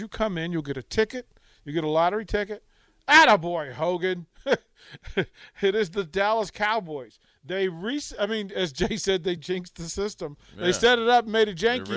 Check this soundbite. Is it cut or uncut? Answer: uncut